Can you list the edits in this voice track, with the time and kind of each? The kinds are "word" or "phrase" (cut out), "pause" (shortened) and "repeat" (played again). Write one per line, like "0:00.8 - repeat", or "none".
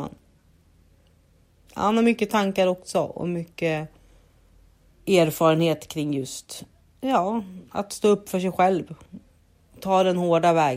0:06.7 - pause